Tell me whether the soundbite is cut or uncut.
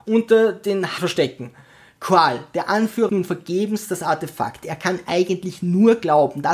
cut